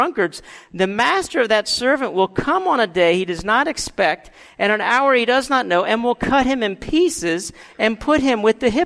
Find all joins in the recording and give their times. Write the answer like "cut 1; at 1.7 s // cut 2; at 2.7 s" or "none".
none